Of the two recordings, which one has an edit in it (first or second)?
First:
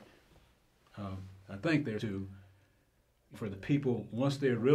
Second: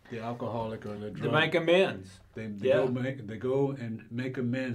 first